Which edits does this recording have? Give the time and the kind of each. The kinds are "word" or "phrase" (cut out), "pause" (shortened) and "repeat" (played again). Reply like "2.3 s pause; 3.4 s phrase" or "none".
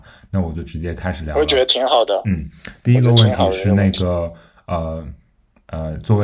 none